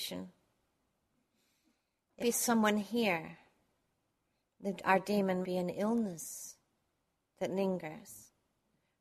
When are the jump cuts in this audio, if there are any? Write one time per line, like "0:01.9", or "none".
0:02.2
0:05.4